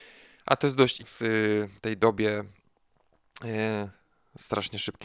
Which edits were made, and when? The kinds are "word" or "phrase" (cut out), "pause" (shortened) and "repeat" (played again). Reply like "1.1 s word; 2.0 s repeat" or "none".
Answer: 1.0 s word; 1.8 s pause